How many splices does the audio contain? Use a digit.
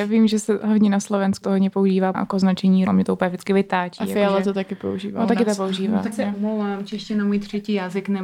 4